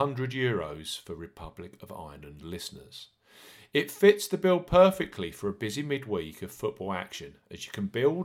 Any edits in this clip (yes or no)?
no